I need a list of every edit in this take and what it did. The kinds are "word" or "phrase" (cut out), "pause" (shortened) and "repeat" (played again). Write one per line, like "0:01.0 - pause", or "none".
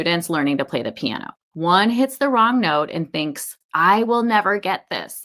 0:01.4 - pause
0:03.6 - pause